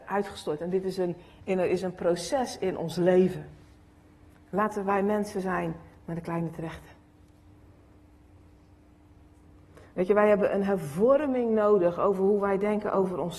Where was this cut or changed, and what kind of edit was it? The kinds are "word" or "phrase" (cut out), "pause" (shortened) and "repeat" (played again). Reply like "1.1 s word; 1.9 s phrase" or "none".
none